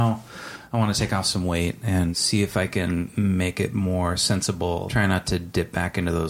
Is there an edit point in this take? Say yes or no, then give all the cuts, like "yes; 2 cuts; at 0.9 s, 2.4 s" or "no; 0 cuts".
no; 0 cuts